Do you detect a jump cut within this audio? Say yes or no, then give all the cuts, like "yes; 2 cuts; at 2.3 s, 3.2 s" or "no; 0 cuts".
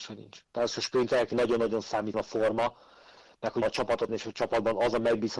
yes; 4 cuts; at 1.3 s, 2.1 s, 3.6 s, 4.1 s